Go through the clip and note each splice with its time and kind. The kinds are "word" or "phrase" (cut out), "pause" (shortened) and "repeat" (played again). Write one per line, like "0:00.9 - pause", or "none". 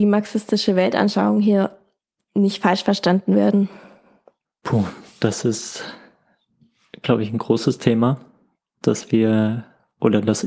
none

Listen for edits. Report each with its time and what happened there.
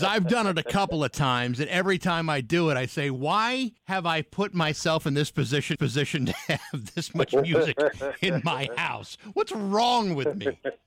0:03.8 - pause
0:05.7 - repeat

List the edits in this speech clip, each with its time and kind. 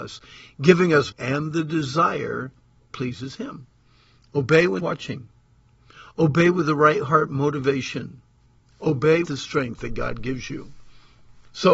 0:01.1 - phrase
0:02.9 - word
0:04.8 - phrase
0:09.2 - word

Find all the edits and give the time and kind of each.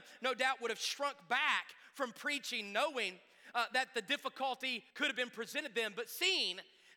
0:04.9 - pause

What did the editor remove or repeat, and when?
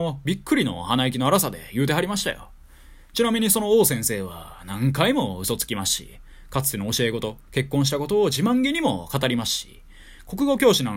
none

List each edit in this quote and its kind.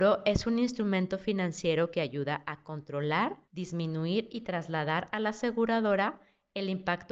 0:03.4 - pause

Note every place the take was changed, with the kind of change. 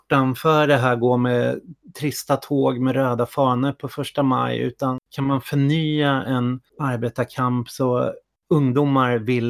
0:06.7 - pause
0:08.4 - pause

